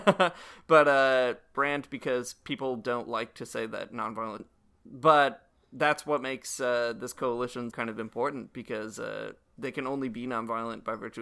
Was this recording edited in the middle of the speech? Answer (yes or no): yes